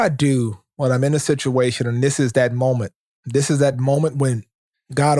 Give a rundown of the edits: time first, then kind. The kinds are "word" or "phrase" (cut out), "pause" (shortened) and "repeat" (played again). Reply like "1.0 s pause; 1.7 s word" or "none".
none